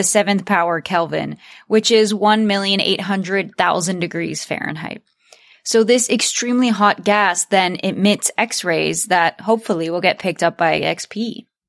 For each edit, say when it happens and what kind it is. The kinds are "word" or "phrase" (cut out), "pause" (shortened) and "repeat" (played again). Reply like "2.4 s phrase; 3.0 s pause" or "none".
none

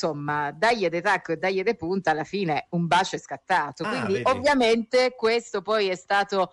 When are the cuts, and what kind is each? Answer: none

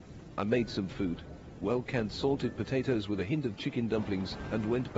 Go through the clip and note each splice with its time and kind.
none

